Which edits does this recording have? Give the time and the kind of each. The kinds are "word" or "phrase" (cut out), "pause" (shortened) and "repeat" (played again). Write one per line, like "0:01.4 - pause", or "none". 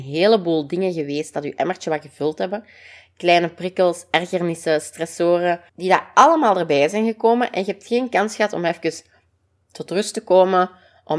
0:05.7 - pause